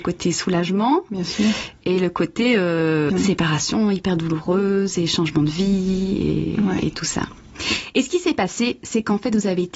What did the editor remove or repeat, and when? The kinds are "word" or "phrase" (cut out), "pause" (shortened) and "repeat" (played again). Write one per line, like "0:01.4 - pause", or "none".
0:03.1 - word